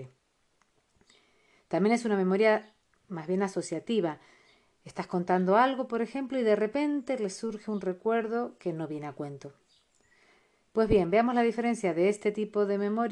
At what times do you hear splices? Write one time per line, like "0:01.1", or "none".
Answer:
none